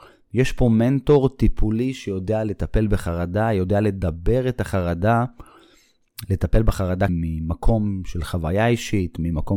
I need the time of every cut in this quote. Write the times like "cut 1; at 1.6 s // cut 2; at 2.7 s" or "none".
cut 1; at 7.1 s